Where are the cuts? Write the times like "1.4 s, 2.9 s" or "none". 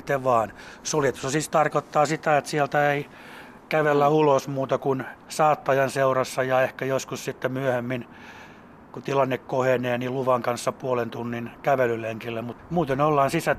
none